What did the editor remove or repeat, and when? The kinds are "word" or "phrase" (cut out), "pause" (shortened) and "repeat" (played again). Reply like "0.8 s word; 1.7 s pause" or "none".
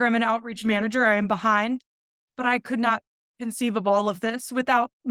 none